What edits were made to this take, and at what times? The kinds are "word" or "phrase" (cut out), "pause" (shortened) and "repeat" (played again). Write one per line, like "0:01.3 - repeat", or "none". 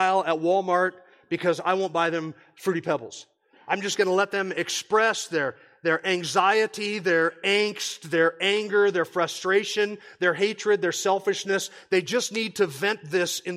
none